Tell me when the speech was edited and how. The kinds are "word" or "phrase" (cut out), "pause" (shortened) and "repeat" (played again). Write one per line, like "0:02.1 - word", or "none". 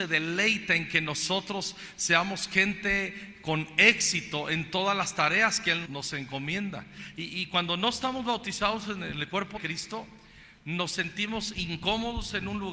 0:05.8 - word
0:09.6 - word